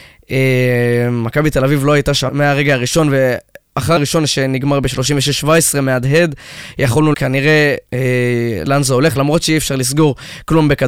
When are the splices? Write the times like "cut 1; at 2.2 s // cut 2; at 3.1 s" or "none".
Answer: cut 1; at 2.3 s // cut 2; at 4.0 s // cut 3; at 7.1 s // cut 4; at 7.9 s // cut 5; at 8.6 s